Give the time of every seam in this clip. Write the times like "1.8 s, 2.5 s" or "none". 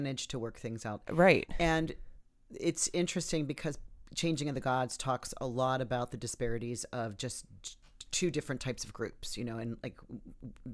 none